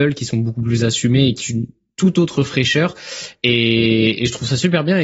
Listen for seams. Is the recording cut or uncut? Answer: cut